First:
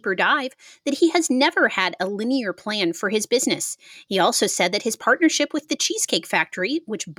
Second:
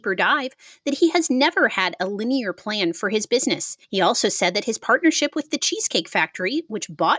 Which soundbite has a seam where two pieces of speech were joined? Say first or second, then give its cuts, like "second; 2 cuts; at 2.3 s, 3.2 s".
second; 1 cut; at 3.8 s